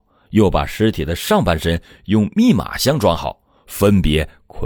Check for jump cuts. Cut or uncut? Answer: uncut